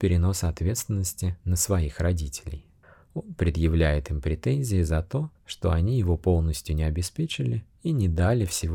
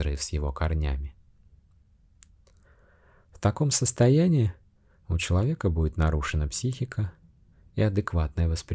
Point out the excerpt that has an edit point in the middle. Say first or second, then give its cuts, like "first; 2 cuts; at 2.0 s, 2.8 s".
first; 4 cuts; at 1.4 s, 2.8 s, 5.4 s, 7.8 s